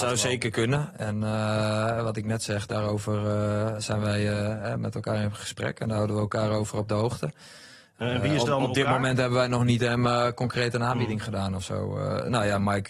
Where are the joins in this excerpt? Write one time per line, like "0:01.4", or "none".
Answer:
none